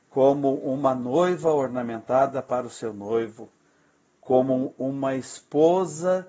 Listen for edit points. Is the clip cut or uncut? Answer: uncut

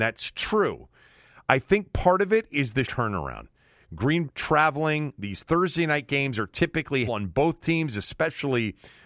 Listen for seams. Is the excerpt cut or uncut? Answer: cut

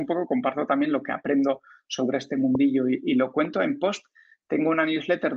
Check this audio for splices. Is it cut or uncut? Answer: uncut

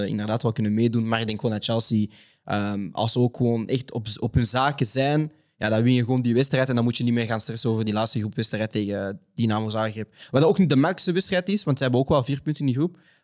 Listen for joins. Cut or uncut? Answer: uncut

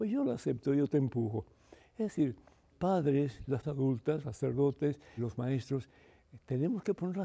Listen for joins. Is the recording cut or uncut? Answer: cut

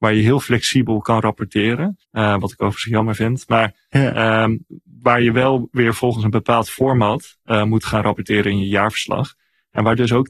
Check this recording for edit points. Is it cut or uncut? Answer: cut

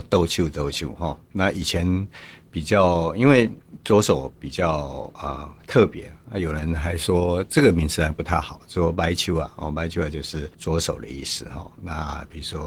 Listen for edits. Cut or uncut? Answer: cut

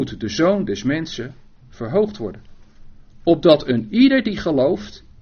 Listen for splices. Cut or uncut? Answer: uncut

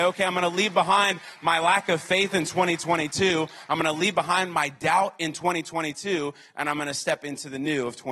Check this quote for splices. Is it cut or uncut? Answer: uncut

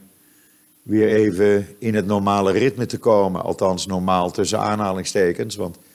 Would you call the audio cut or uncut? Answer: uncut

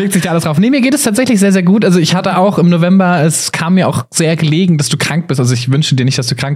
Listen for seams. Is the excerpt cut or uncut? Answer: uncut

